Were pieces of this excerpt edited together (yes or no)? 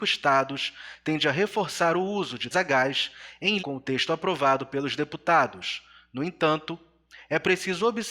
yes